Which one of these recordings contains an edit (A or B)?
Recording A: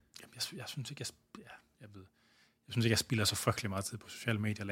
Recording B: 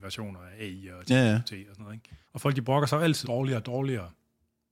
B